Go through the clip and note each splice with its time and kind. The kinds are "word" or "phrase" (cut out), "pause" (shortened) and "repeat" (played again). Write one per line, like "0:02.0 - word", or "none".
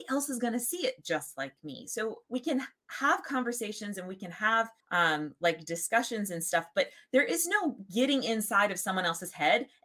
0:02.2 - pause
0:04.8 - pause